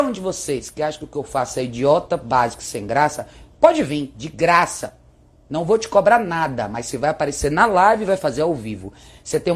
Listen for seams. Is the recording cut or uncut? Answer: uncut